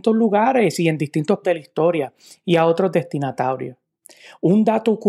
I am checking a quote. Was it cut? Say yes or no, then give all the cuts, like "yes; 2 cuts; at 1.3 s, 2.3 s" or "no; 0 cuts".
yes; 1 cut; at 1.4 s